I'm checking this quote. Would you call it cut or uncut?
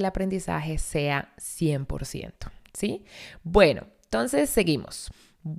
uncut